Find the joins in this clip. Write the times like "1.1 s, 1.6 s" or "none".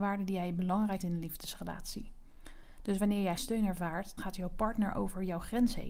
1.0 s, 3.4 s, 4.2 s